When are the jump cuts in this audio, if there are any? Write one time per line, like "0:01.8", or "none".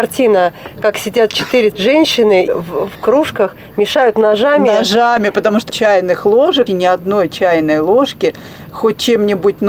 0:01.7
0:02.5
0:05.7
0:06.7